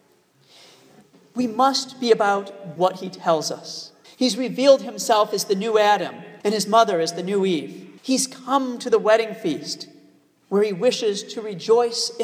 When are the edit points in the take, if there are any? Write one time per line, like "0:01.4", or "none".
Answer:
0:02.8
0:04.0
0:06.4
0:08.0